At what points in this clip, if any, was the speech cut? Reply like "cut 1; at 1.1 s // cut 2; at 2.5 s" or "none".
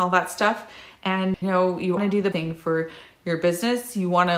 cut 1; at 1.4 s // cut 2; at 2.0 s // cut 3; at 2.3 s